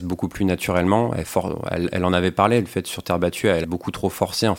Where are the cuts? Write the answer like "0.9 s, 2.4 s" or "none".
3.6 s